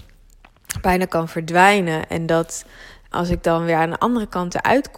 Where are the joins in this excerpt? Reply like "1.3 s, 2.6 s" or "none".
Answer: 3.1 s